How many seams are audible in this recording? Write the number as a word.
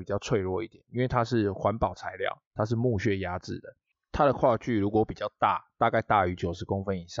one